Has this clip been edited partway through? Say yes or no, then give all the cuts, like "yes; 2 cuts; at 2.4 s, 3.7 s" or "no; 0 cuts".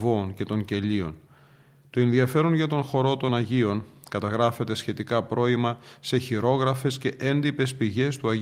yes; 1 cut; at 3.3 s